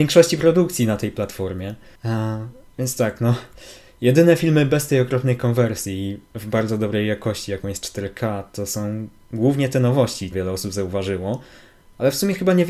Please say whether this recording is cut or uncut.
cut